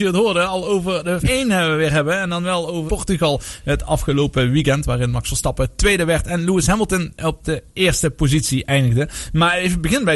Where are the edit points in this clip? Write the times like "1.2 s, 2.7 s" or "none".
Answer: 1.2 s, 2.9 s